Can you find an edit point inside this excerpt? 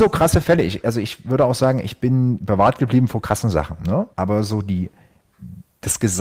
yes; 1 cut; at 4.1 s

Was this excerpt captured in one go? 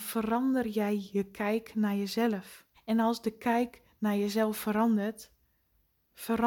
no; 1 cut; at 2.7 s

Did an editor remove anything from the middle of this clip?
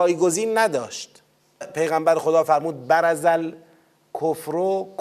yes; 1 cut; at 1.6 s

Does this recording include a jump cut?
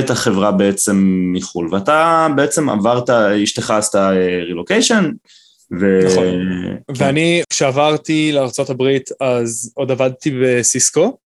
yes; 1 cut; at 7.4 s

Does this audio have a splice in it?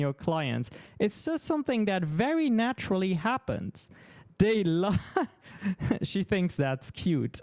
no; 0 cuts

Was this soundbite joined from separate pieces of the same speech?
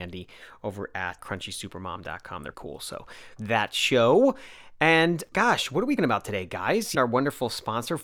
yes; 6 cuts; at 1.2 s, 2.5 s, 3.4 s, 5.3 s, 6.0 s, 6.9 s

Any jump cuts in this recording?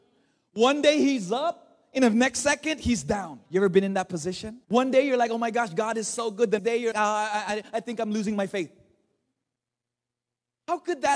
yes; 4 cuts; at 3.4 s, 4.6 s, 6.6 s, 6.9 s

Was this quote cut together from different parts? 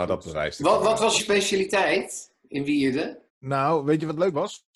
yes; 2 cuts; at 1.2 s, 3.3 s

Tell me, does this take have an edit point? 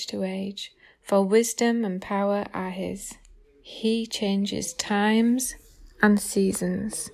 yes; 1 cut; at 3.4 s

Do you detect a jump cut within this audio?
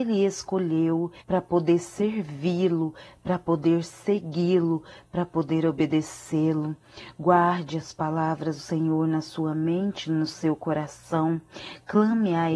yes; 2 cuts; at 1.2 s, 8.6 s

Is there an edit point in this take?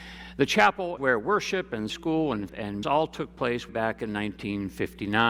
yes; 5 cuts; at 1.0 s, 1.9 s, 2.5 s, 2.8 s, 3.7 s

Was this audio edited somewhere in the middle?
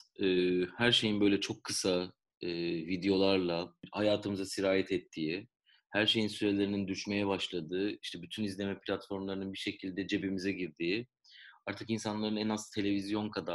no; 0 cuts

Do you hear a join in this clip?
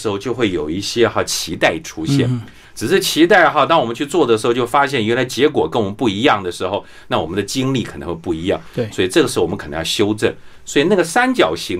no; 0 cuts

